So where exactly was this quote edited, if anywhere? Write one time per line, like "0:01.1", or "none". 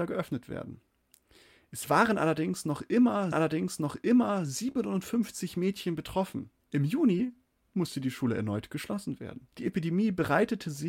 0:03.3
0:06.6
0:09.5